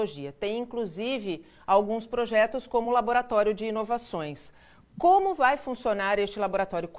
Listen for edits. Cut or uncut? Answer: uncut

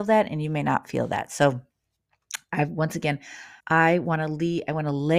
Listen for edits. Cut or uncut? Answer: cut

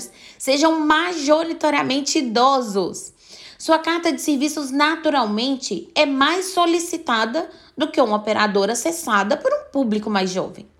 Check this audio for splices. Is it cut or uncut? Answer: uncut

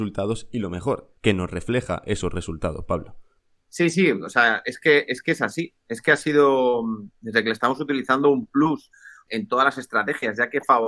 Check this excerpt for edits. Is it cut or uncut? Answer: cut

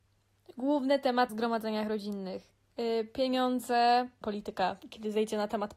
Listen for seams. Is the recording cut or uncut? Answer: cut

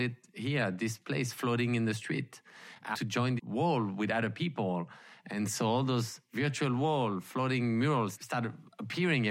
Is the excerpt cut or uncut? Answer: cut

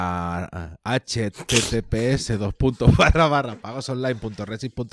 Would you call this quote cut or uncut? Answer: uncut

